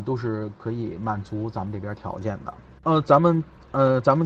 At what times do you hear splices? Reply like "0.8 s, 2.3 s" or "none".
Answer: 2.8 s